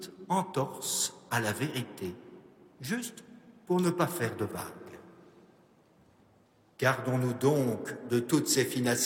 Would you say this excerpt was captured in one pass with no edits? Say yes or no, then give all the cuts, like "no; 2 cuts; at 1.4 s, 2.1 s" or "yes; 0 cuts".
yes; 0 cuts